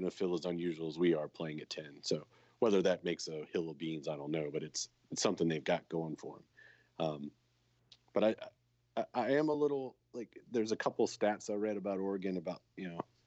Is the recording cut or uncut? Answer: uncut